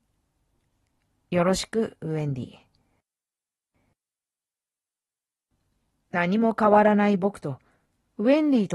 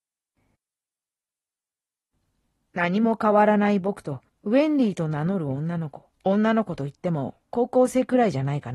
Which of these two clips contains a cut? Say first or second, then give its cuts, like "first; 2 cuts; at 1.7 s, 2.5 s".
second; 2 cuts; at 4.3 s, 6.1 s